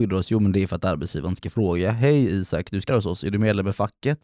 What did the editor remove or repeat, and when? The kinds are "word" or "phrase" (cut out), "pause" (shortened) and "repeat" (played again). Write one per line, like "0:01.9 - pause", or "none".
0:02.9 - word